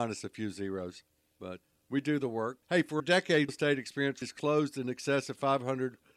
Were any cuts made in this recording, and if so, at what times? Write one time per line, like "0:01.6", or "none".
0:01.6
0:02.6
0:03.0
0:03.5
0:04.2